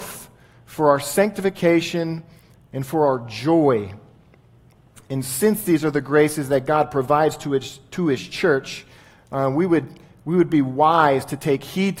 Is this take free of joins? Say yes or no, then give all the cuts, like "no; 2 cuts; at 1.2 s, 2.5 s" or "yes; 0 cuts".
yes; 0 cuts